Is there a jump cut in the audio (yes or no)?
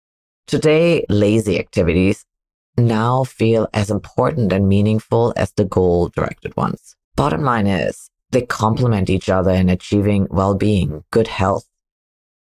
yes